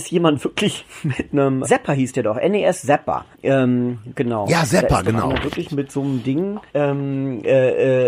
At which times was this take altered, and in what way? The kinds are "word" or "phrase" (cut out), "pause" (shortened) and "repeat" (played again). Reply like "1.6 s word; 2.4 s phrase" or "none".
1.3 s phrase; 1.6 s word; 3.3 s pause; 6.7 s pause